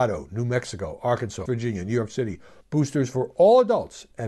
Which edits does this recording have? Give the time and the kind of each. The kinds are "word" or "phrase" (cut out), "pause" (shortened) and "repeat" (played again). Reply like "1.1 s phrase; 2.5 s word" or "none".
1.5 s word; 2.6 s word